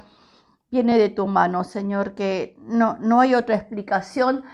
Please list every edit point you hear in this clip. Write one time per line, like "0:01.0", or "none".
none